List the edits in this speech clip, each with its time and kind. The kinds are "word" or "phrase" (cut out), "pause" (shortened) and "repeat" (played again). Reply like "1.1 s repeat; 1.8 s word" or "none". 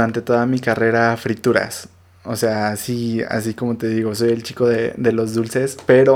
none